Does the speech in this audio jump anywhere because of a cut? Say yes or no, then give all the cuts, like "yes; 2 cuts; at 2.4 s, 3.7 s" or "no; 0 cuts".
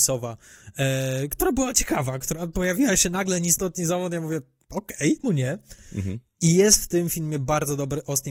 yes; 1 cut; at 5.2 s